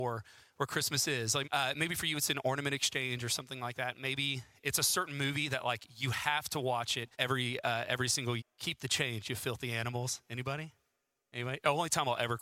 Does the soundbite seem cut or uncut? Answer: cut